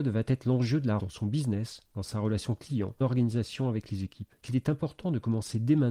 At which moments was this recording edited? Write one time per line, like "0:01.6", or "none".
0:01.0
0:03.0
0:04.4